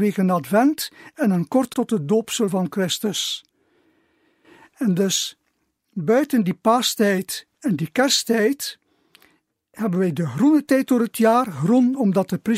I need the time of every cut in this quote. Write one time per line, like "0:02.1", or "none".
0:01.7